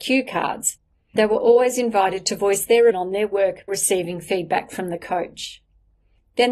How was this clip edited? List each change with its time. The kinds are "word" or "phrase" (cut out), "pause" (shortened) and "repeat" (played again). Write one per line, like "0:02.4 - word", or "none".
0:01.2 - word
0:02.9 - word
0:03.7 - word